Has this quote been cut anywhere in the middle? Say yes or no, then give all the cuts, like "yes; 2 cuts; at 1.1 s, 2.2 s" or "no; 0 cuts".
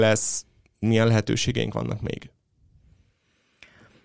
no; 0 cuts